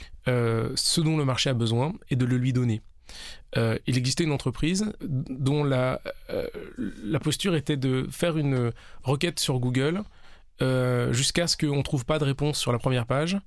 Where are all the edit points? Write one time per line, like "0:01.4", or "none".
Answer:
0:05.0

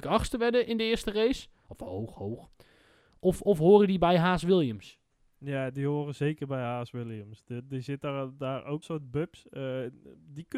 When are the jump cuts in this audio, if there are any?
0:08.8

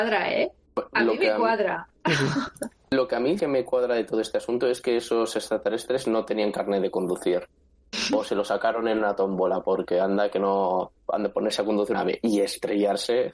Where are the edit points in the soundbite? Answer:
0:03.4
0:11.9

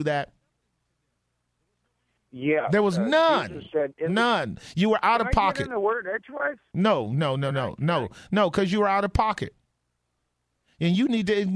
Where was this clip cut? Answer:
none

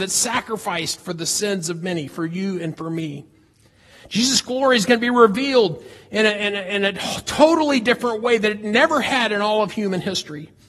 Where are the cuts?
none

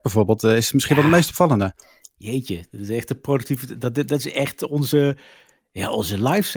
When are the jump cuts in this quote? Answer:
none

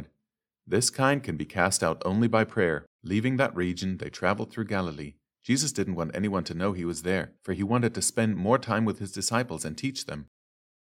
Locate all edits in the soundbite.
0:02.9
0:07.4

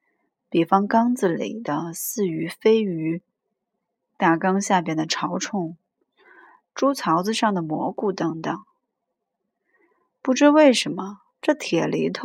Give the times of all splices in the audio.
0:11.3

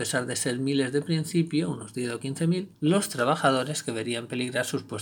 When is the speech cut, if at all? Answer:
0:02.7

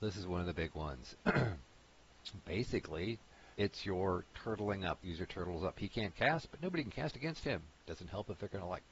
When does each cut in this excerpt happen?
0:03.5
0:05.0
0:07.7

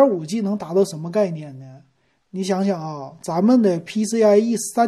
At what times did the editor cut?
none

